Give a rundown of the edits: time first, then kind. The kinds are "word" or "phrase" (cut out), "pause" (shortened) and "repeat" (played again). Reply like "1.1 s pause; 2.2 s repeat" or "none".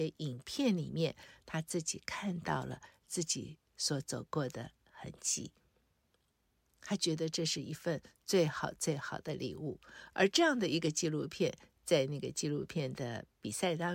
4.8 s pause